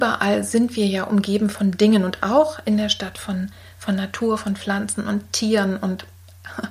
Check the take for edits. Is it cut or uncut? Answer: uncut